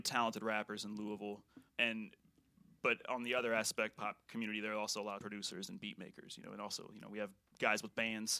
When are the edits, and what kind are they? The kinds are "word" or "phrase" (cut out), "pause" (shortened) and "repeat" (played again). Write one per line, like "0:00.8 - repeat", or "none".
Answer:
0:01.7 - word
0:04.0 - phrase
0:05.2 - phrase